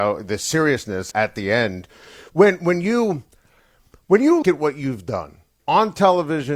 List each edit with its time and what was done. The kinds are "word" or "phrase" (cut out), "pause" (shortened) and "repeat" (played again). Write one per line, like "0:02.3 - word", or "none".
0:01.1 - word
0:04.4 - word
0:05.6 - word